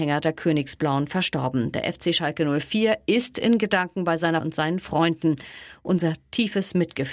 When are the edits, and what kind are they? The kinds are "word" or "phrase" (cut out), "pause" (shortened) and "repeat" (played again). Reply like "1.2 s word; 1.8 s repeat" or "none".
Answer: 4.4 s word